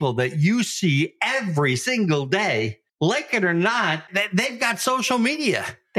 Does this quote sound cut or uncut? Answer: cut